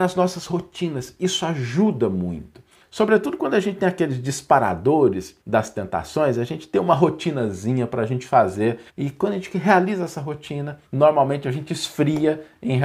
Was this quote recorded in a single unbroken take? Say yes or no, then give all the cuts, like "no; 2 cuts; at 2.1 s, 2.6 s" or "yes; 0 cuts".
no; 4 cuts; at 2.8 s, 5.4 s, 8.9 s, 10.9 s